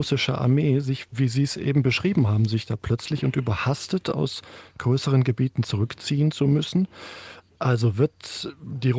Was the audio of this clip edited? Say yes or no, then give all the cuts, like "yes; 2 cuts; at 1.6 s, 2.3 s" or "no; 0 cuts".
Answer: no; 0 cuts